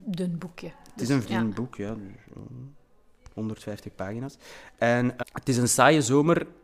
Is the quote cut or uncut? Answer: cut